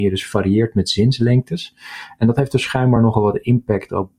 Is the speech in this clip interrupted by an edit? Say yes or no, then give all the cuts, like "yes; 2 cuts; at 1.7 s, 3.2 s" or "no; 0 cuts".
no; 0 cuts